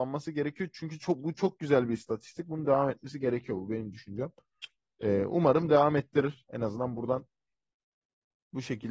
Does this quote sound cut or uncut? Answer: uncut